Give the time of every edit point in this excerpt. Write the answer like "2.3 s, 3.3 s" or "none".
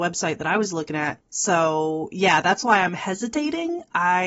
none